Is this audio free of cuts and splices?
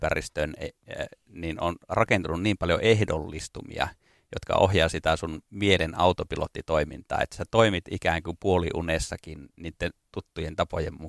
yes; 0 cuts

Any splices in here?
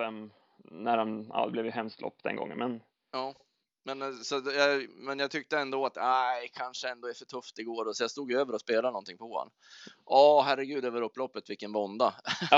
no; 0 cuts

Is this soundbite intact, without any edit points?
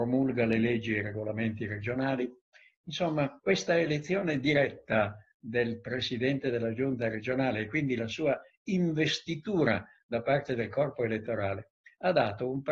no; 1 cut; at 3.4 s

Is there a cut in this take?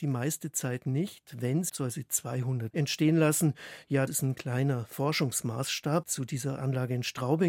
yes; 4 cuts; at 1.7 s, 2.7 s, 4.1 s, 6.0 s

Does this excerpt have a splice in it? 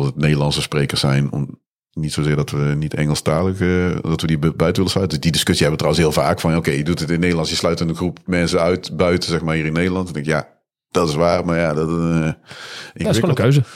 no; 0 cuts

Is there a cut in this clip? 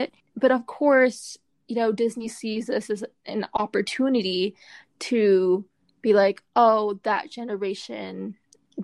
no; 0 cuts

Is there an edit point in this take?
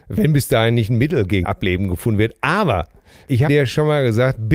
yes; 2 cuts; at 1.4 s, 3.5 s

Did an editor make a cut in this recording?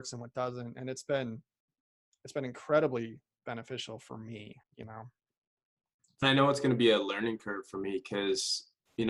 yes; 2 cuts; at 4.6 s, 6.2 s

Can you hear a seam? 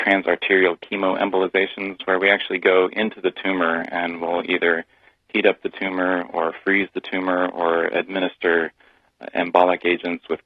no; 0 cuts

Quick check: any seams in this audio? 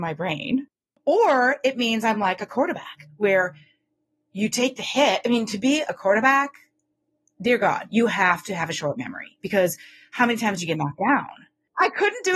no; 0 cuts

